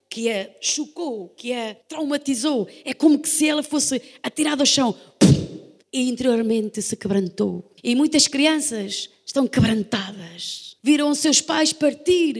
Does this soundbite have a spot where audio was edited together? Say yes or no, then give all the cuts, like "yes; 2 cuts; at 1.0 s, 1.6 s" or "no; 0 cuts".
yes; 4 cuts; at 1.8 s, 5.8 s, 7.8 s, 10.8 s